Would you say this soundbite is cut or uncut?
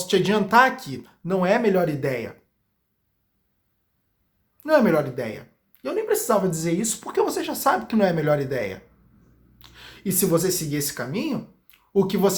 uncut